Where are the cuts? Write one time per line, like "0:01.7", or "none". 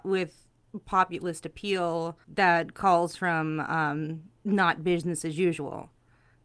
0:02.2
0:04.4